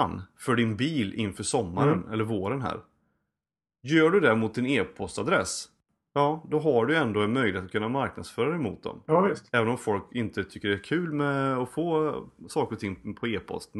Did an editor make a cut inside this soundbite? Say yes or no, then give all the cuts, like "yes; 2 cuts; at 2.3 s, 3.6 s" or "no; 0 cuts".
no; 0 cuts